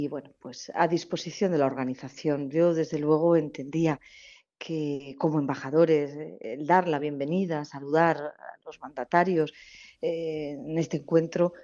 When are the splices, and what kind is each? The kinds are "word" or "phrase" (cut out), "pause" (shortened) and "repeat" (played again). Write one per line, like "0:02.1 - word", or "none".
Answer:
none